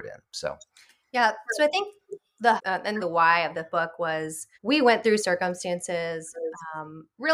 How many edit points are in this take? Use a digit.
4